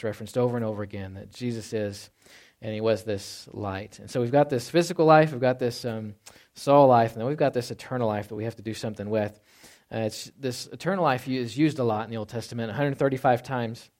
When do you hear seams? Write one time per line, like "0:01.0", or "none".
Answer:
none